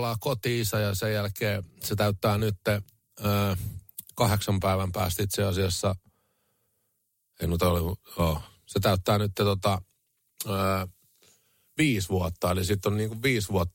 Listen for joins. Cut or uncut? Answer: uncut